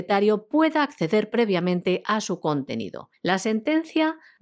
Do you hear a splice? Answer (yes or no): no